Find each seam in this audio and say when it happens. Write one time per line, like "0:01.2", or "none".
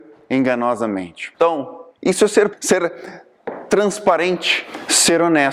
0:01.3
0:02.5